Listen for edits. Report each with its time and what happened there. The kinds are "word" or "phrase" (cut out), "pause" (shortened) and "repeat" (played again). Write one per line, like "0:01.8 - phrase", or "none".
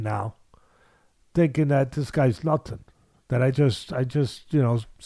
none